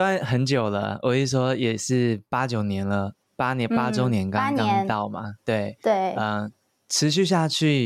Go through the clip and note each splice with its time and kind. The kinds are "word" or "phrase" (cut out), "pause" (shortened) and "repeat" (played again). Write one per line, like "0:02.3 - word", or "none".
none